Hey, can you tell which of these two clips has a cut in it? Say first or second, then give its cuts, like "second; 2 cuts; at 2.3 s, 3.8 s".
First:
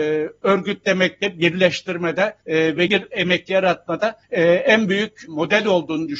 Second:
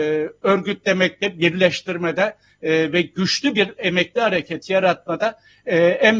first; 5 cuts; at 2.4 s, 2.9 s, 3.5 s, 4.2 s, 5.3 s